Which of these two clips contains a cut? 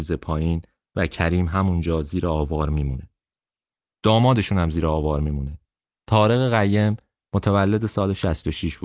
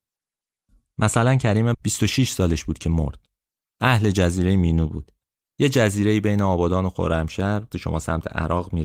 second; 2 cuts; at 1.7 s, 7.7 s

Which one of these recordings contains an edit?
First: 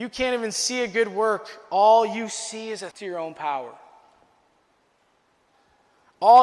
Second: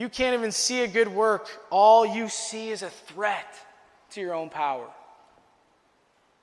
first; 1 cut; at 2.9 s

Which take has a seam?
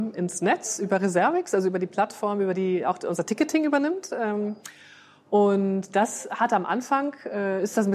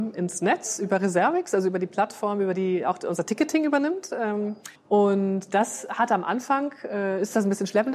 second; 1 cut; at 4.8 s

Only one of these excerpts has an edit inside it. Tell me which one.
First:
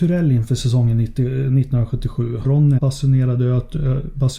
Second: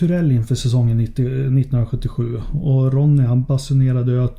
first; 2 cuts; at 2.4 s, 2.8 s

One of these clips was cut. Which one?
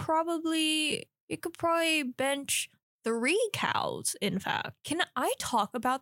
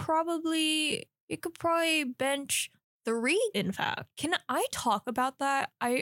second; 1 cut; at 3.5 s

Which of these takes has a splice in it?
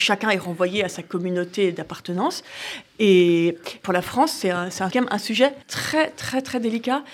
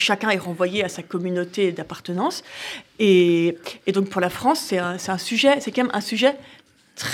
first; 3 cuts; at 3.8 s, 4.9 s, 5.6 s

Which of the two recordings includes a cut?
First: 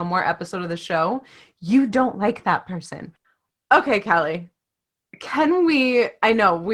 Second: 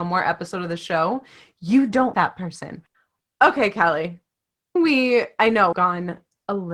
second; 3 cuts; at 2.1 s, 4.8 s, 5.7 s

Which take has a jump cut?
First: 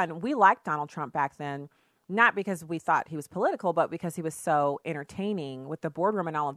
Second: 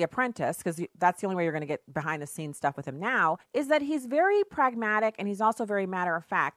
second; 1 cut; at 3.4 s

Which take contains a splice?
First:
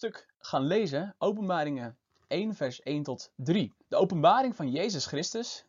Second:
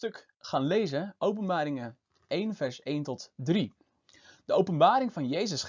first; 1 cut; at 3.8 s

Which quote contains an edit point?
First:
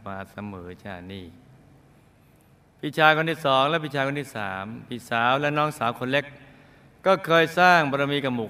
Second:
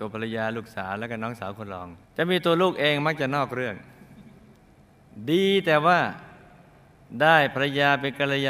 second; 1 cut; at 2.0 s

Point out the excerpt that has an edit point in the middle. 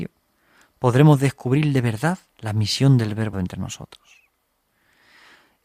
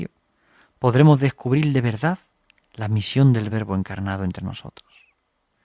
first; 2 cuts; at 2.3 s, 3.3 s

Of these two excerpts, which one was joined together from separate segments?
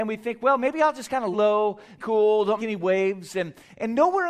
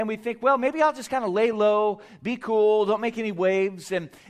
first; 3 cuts; at 1.3 s, 2.0 s, 2.6 s

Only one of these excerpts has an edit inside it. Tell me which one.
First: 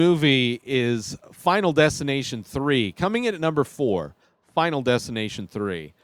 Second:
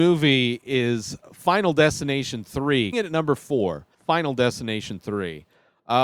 second; 2 cuts; at 2.9 s, 3.9 s

